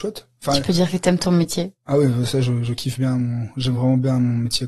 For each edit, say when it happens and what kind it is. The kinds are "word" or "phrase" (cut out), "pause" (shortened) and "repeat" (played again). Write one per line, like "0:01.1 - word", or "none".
none

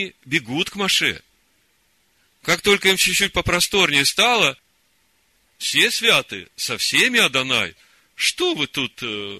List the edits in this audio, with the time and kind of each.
none

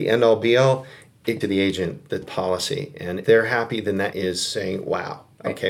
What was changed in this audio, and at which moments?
0:01.4 - phrase
0:02.2 - word
0:03.2 - word
0:04.1 - word

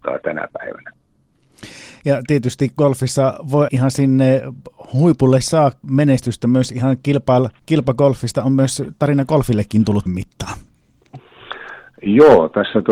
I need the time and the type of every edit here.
0:03.7 - word
0:05.8 - word
0:10.1 - word

